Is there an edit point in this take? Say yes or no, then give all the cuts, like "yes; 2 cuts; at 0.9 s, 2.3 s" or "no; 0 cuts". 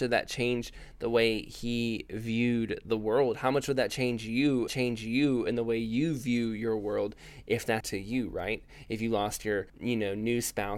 yes; 3 cuts; at 4.7 s, 7.8 s, 9.7 s